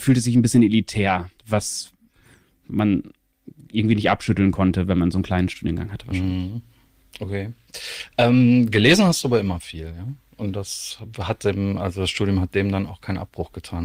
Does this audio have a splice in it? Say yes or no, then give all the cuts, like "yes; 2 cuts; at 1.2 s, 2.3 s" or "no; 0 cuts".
yes; 1 cut; at 1.4 s